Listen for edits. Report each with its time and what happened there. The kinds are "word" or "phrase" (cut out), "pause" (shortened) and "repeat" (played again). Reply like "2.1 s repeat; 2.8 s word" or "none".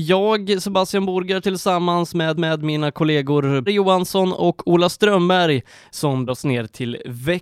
1.4 s word; 2.4 s repeat; 3.7 s word; 6.3 s word